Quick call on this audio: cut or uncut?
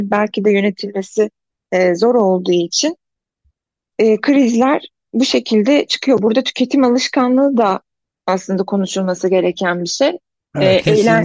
uncut